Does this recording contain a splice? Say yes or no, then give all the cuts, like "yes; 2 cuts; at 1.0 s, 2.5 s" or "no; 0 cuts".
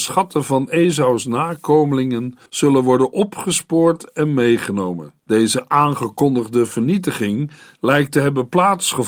yes; 2 cuts; at 2.5 s, 5.2 s